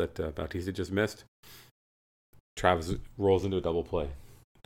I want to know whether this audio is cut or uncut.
uncut